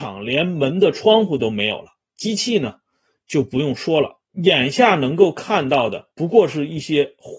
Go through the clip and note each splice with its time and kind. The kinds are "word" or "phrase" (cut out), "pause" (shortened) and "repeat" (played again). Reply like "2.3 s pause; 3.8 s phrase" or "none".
4.2 s pause; 6.1 s pause

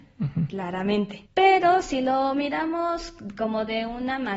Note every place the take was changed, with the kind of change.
1.3 s pause

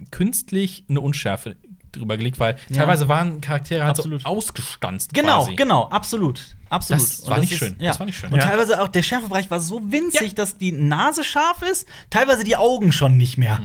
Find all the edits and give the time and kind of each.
none

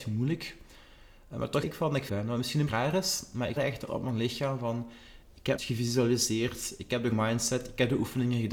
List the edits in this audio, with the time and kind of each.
1.6 s word; 2.1 s word; 2.7 s word; 3.6 s word; 3.9 s word; 5.6 s word; 7.1 s word

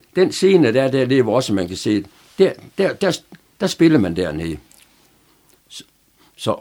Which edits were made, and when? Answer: none

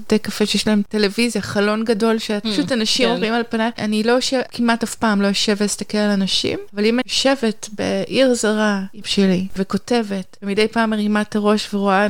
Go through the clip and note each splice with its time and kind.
7.0 s word; 9.0 s word

